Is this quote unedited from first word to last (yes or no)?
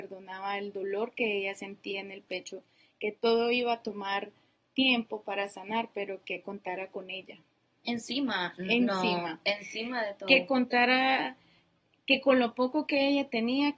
yes